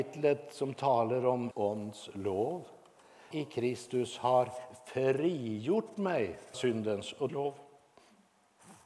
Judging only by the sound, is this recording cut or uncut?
cut